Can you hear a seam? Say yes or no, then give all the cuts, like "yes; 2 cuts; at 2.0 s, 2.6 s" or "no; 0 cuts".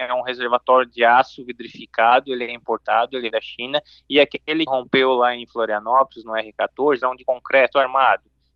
yes; 3 cuts; at 3.3 s, 4.7 s, 7.0 s